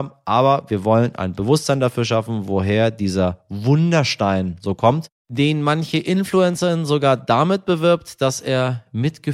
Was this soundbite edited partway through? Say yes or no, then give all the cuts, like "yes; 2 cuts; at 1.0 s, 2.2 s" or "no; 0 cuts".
no; 0 cuts